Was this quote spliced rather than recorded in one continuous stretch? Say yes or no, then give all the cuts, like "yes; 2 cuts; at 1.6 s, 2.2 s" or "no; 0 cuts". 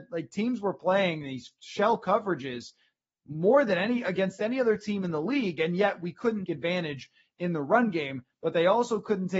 yes; 1 cut; at 6.5 s